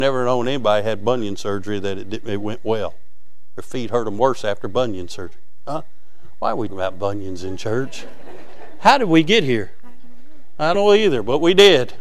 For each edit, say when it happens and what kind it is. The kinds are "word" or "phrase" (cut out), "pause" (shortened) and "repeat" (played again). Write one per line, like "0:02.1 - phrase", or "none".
0:06.7 - word
0:10.7 - word